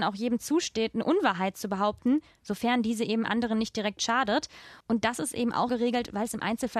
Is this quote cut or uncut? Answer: cut